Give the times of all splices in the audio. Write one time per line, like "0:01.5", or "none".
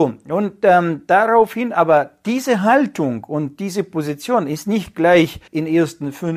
0:05.5